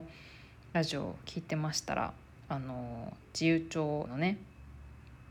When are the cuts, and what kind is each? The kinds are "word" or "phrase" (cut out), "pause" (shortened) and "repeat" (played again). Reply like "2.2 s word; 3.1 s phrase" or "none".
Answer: 4.0 s word